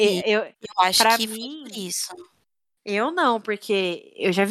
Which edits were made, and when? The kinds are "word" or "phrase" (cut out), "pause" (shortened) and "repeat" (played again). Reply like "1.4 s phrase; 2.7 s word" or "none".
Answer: none